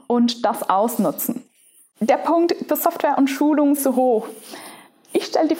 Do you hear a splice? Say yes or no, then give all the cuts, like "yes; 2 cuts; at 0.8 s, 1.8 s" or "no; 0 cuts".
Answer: yes; 2 cuts; at 2.7 s, 3.8 s